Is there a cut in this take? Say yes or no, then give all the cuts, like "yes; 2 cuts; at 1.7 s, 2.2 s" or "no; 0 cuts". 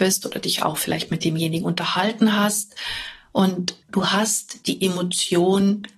yes; 1 cut; at 3.8 s